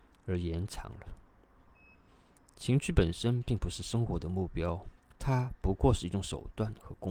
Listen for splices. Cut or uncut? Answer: cut